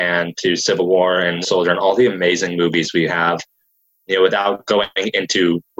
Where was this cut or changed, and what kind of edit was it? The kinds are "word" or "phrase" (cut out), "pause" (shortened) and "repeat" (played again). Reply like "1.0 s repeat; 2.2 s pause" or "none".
1.4 s word

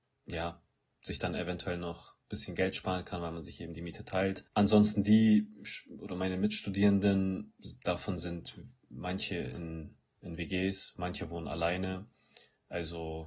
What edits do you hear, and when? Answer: 4.5 s pause

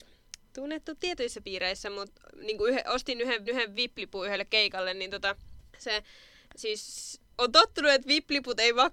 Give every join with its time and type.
3.5 s repeat; 5.7 s pause; 7.3 s pause

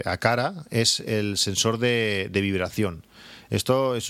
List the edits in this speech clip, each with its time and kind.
none

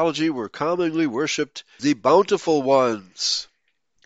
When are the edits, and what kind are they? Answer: 1.8 s word

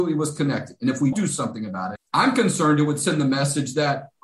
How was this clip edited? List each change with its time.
1.1 s word; 2.0 s word

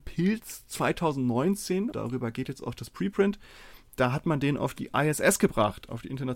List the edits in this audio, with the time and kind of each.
1.9 s word

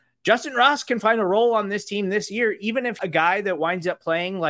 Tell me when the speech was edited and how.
3.0 s phrase

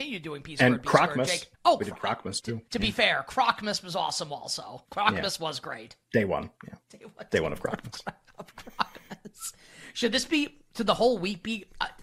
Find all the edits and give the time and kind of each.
1.5 s pause; 2.7 s pause; 4.8 s pause; 6.0 s pause; 6.6 s pause

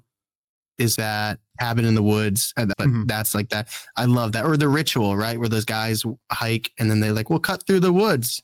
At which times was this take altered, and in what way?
1.0 s word; 2.7 s phrase

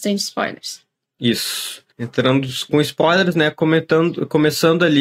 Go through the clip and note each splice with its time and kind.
1.9 s pause

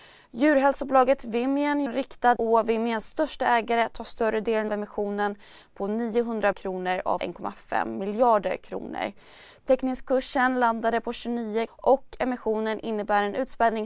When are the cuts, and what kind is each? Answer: 1.9 s word; 2.4 s word; 4.7 s word; 6.5 s word; 7.2 s word; 11.7 s word

